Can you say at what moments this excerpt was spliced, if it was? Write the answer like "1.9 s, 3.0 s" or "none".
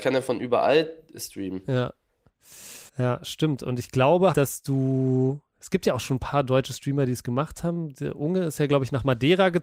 2.9 s, 4.3 s